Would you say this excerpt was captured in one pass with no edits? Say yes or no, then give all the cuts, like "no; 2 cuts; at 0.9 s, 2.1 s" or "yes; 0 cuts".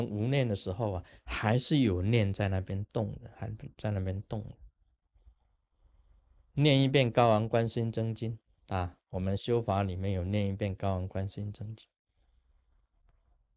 yes; 0 cuts